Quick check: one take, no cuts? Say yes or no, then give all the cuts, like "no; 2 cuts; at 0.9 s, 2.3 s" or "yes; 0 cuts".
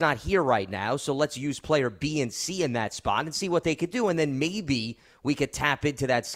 yes; 0 cuts